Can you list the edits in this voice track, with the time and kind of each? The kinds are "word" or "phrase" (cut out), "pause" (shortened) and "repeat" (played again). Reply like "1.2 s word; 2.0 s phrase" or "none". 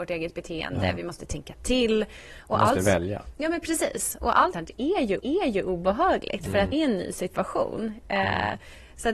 4.5 s word; 5.2 s repeat; 6.7 s word